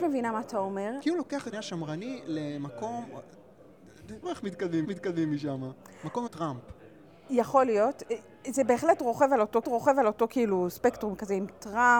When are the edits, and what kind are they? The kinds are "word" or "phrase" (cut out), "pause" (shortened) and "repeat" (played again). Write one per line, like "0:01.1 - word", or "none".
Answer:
0:01.5 - word
0:04.2 - phrase
0:04.8 - repeat
0:06.3 - word
0:09.6 - repeat